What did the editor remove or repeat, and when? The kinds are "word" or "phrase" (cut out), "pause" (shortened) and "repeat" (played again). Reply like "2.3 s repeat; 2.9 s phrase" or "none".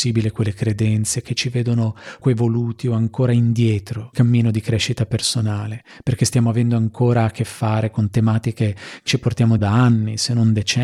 2.2 s word; 4.1 s word; 9.1 s word; 9.6 s word